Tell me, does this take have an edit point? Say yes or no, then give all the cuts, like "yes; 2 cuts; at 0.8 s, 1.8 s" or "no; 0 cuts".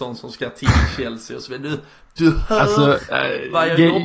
no; 0 cuts